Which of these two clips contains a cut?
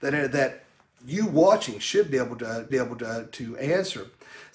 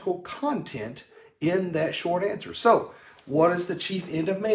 first; 1 cut; at 2.7 s

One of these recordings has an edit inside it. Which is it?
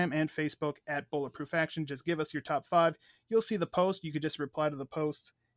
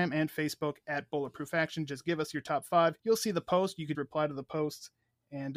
second; 2 cuts; at 3.0 s, 3.9 s

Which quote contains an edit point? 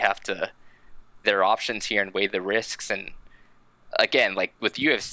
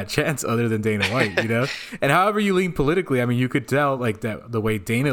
first; 1 cut; at 1.2 s

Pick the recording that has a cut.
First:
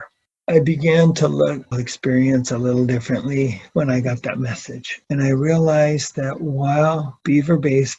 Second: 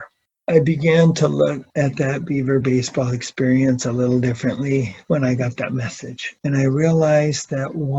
first; 1 cut; at 1.7 s

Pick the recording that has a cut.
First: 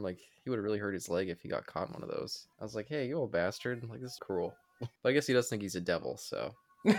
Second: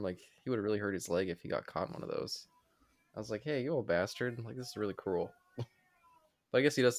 first; 3 cuts; at 2.5 s, 4.2 s, 5.0 s

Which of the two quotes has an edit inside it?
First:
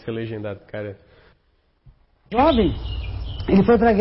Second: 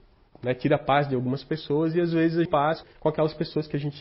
second; 2 cuts; at 2.5 s, 2.8 s

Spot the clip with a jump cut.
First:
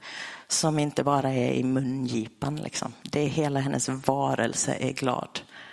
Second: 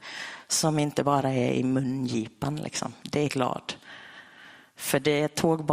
second; 1 cut; at 3.3 s

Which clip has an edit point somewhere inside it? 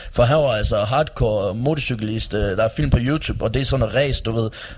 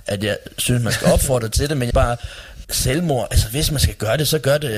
second; 2 cuts; at 1.9 s, 2.6 s

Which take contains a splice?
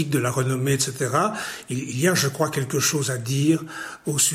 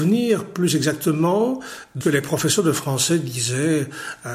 second; 1 cut; at 2.0 s

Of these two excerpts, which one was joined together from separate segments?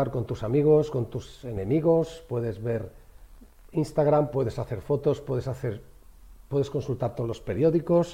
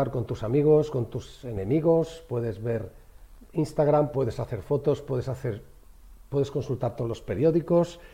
second; 1 cut; at 3.5 s

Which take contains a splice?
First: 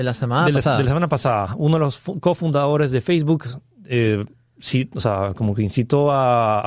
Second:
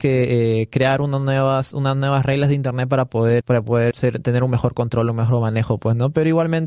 second; 2 cuts; at 3.4 s, 3.9 s

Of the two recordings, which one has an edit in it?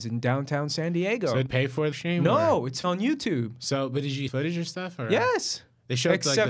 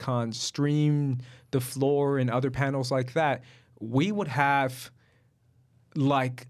first; 4 cuts; at 1.5 s, 1.9 s, 2.8 s, 4.3 s

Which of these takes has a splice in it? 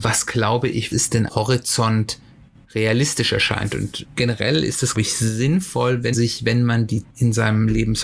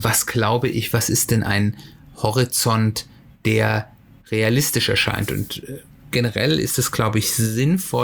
first; 7 cuts; at 0.9 s, 1.3 s, 2.5 s, 4.0 s, 4.9 s, 6.1 s, 7.0 s

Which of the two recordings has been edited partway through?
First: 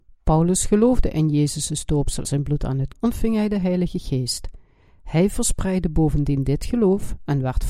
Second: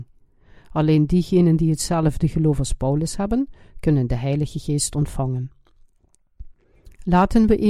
first; 2 cuts; at 2.2 s, 2.9 s

